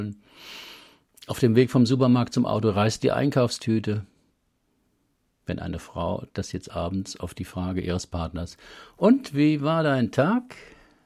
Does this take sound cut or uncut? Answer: uncut